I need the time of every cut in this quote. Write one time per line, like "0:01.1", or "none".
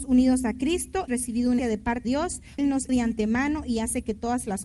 0:01.1
0:01.6
0:02.0
0:02.6
0:02.9